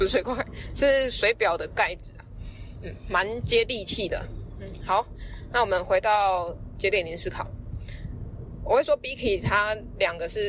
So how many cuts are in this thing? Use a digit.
0